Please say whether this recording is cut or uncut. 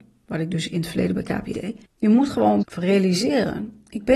cut